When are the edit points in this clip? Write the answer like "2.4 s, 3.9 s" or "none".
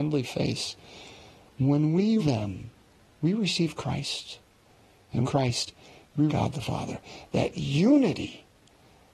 2.2 s, 2.8 s, 5.2 s, 6.3 s